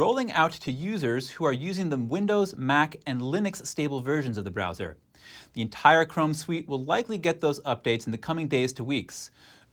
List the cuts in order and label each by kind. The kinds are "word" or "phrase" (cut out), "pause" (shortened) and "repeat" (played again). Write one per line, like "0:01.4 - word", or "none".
none